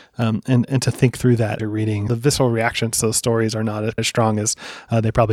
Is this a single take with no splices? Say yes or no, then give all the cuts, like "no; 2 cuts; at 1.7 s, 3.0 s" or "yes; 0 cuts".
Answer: no; 3 cuts; at 1.6 s, 2.1 s, 4.0 s